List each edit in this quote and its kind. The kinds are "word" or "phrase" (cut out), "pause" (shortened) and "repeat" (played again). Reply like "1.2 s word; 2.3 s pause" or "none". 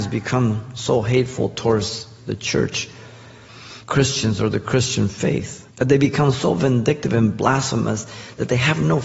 3.8 s pause; 5.7 s pause